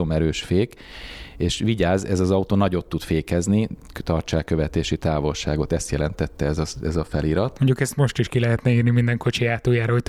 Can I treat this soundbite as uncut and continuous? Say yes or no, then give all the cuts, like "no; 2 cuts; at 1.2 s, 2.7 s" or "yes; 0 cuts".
yes; 0 cuts